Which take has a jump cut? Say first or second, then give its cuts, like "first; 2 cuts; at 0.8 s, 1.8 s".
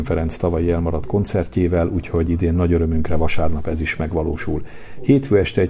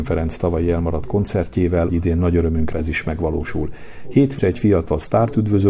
second; 3 cuts; at 1.9 s, 2.7 s, 4.4 s